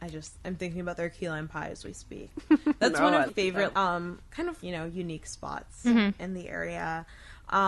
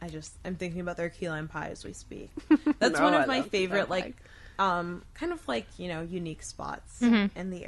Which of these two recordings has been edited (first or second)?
first